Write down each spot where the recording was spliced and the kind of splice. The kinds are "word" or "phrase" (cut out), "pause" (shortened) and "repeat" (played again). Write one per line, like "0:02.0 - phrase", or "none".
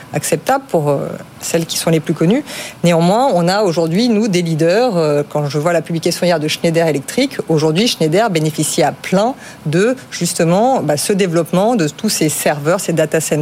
none

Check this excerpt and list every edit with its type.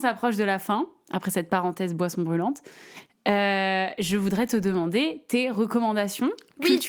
none

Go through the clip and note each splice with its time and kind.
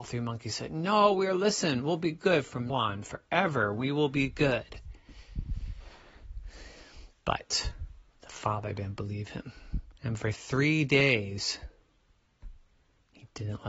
0:02.7 - word
0:08.1 - pause
0:10.0 - pause

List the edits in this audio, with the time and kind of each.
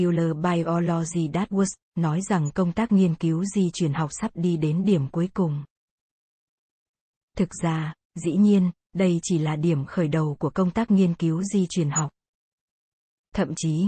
none

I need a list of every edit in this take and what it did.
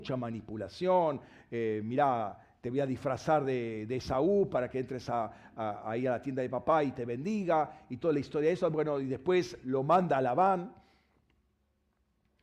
none

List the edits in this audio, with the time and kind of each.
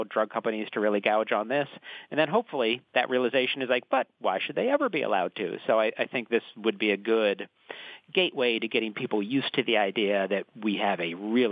0:02.9 - pause

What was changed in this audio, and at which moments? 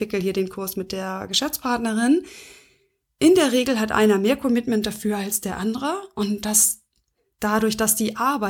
none

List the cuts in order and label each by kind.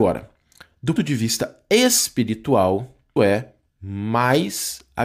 0:01.0 - word
0:03.2 - word

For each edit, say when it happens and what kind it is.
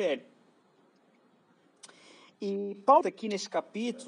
0:03.0 - word

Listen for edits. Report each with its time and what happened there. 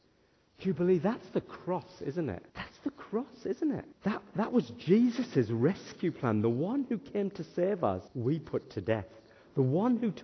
0:02.5 - pause
0:03.9 - pause
0:08.1 - pause

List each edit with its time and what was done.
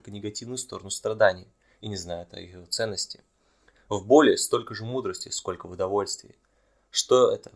none

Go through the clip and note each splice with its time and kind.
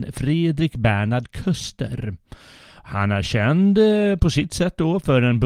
none

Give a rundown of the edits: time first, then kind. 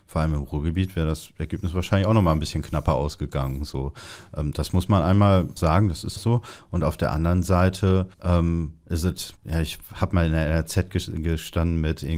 0:05.6 - word
0:06.2 - word
0:08.1 - pause
0:09.4 - pause

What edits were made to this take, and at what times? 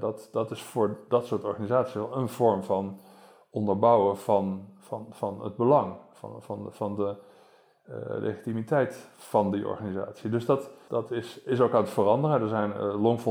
0:10.9 - phrase

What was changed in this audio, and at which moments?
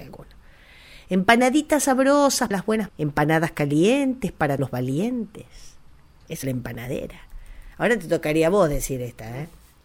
0:02.5 - word
0:02.9 - word
0:04.6 - word
0:06.4 - word

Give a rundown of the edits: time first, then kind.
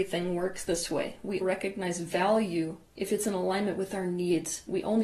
0:01.4 - word

